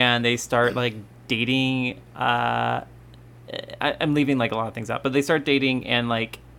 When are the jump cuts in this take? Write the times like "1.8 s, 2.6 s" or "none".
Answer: none

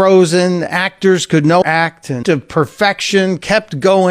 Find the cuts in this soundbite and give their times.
1.6 s, 2.2 s

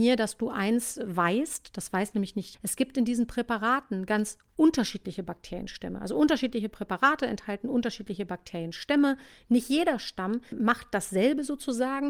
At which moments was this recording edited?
2.5 s, 10.5 s

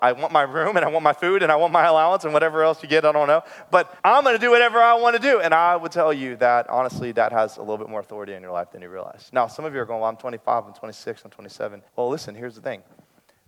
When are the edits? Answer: 4.0 s, 11.9 s

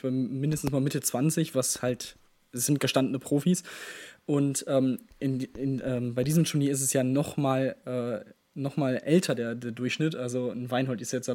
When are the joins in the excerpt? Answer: none

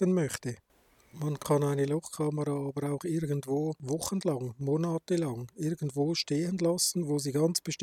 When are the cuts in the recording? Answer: none

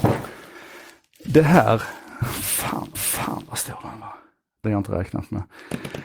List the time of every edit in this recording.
2.9 s, 4.6 s

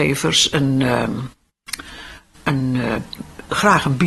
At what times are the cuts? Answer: none

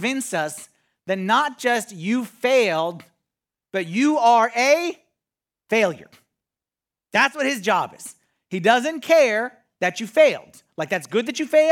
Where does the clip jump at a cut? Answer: none

